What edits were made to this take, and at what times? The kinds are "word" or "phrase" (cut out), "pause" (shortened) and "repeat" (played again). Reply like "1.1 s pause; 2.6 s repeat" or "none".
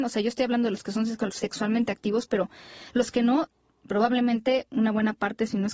none

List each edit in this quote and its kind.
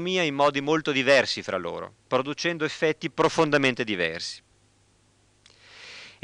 2.0 s pause

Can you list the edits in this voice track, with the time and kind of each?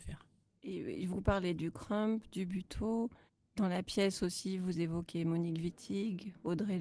3.3 s pause

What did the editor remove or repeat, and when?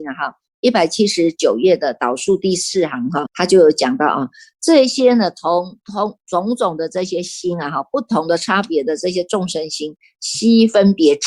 3.3 s word

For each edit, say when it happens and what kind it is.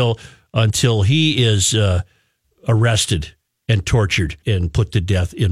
3.5 s pause; 4.4 s word

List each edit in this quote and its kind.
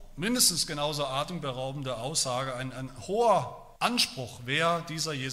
3.8 s pause

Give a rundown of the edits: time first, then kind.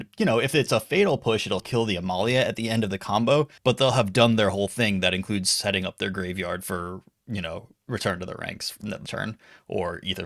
1.6 s word; 3.6 s pause; 7.8 s word; 9.1 s word

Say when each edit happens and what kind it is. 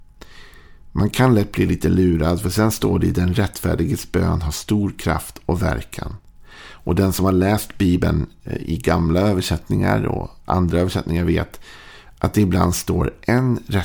none

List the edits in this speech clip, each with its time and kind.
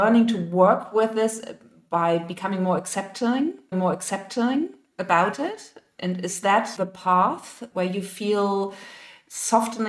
3.7 s repeat; 6.8 s word; 7.7 s word

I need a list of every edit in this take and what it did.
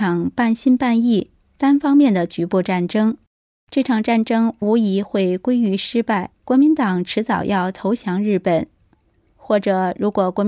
6.4 s pause

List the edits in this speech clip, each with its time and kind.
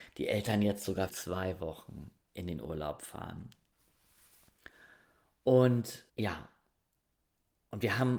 1.1 s word; 6.1 s pause

